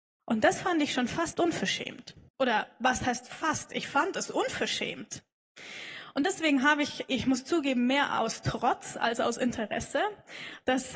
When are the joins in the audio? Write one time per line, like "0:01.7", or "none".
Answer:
0:02.3